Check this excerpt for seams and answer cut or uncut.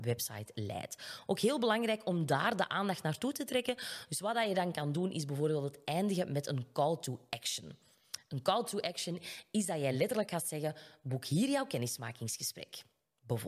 uncut